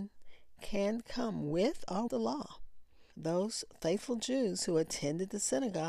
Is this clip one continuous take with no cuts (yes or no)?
no